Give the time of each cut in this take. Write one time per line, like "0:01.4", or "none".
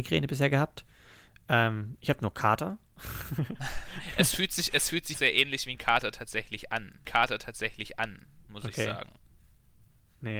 0:05.1
0:07.0